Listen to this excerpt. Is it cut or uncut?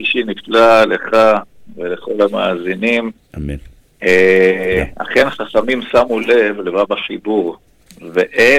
cut